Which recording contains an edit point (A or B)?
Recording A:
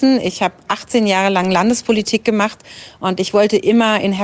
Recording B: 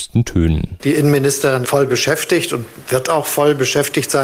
B